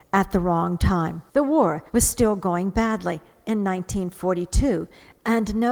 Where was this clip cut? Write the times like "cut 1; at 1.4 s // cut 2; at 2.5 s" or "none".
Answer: cut 1; at 1.3 s // cut 2; at 1.9 s